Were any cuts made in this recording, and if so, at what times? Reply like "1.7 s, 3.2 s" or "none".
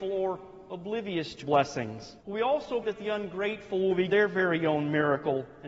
1.4 s, 2.2 s, 2.8 s, 4.1 s

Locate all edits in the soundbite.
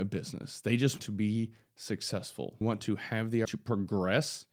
1.0 s, 2.6 s, 3.5 s

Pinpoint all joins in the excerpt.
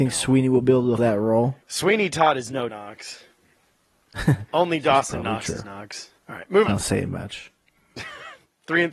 1.0 s, 1.6 s, 2.7 s, 4.5 s, 5.6 s, 6.2 s, 6.7 s

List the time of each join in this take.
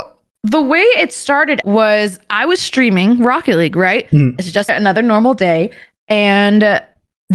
1.6 s, 4.7 s

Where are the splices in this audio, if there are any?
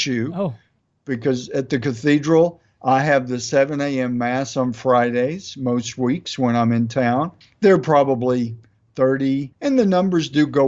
7.4 s, 9.5 s

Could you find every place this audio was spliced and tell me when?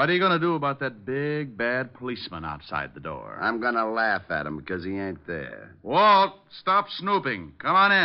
none

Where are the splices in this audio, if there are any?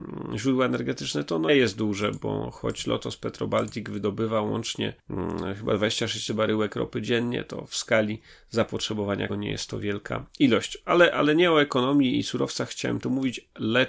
1.5 s, 6.3 s, 9.3 s

